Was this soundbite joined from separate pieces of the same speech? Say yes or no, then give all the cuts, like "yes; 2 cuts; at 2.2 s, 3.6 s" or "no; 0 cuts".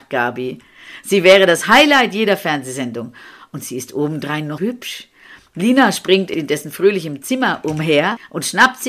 yes; 1 cut; at 4.6 s